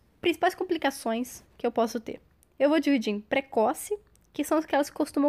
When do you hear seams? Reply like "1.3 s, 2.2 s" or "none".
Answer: none

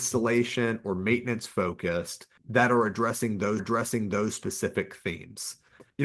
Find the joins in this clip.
2.4 s, 3.6 s

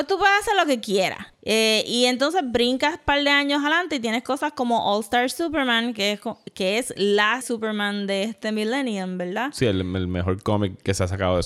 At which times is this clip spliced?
1.3 s, 7.4 s

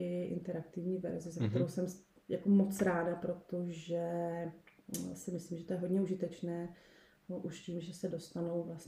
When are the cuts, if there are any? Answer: none

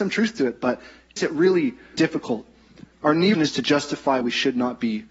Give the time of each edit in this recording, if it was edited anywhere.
1.2 s, 1.9 s, 3.3 s, 4.2 s

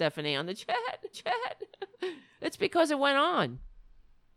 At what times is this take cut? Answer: 1.1 s

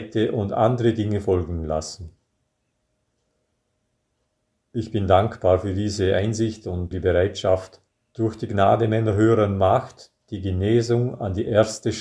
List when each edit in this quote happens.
6.9 s, 7.9 s

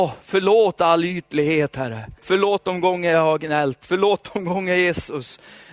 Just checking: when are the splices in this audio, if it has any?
2.2 s

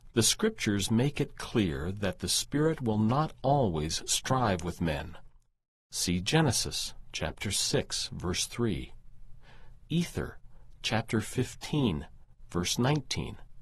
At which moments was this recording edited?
none

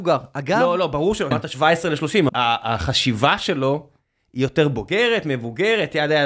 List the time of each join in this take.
1.3 s, 2.3 s

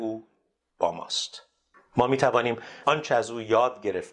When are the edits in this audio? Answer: 1.7 s, 2.8 s

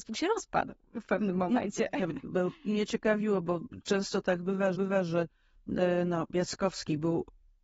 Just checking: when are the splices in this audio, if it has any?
4.7 s

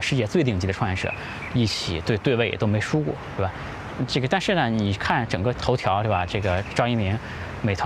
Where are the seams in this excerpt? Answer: 5.5 s

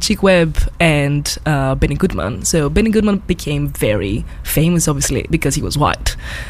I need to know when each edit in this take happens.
none

